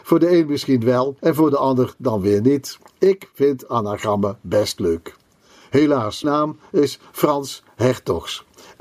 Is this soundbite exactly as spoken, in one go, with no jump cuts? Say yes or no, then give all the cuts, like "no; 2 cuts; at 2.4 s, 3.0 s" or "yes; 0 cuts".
no; 3 cuts; at 1.2 s, 2.9 s, 6.2 s